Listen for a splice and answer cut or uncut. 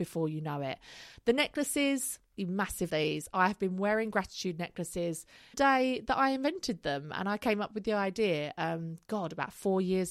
cut